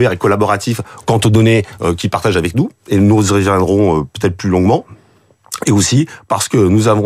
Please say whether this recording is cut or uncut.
uncut